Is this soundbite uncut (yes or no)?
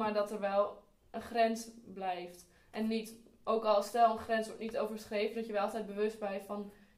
yes